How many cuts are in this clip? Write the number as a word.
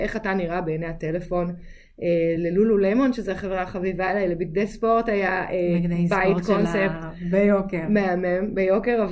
zero